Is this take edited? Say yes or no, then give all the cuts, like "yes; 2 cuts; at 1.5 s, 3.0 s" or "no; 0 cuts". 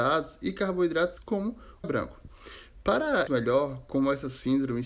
yes; 3 cuts; at 1.2 s, 1.8 s, 3.3 s